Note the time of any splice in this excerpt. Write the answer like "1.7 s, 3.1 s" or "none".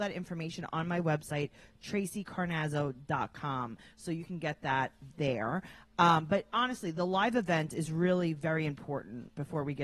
none